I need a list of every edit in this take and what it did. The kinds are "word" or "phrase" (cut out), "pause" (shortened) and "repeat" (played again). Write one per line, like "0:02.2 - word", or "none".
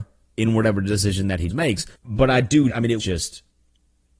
0:01.5 - word
0:01.9 - pause
0:02.7 - word
0:03.0 - word